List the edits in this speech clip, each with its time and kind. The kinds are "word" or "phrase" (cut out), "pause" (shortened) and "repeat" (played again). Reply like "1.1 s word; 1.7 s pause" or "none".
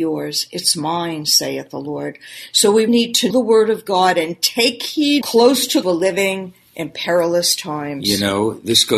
2.9 s word; 3.3 s word; 5.2 s phrase; 5.8 s phrase